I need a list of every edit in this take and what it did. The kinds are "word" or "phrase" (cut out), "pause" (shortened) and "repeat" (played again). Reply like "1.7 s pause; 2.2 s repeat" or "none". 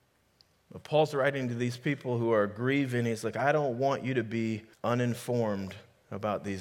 4.7 s pause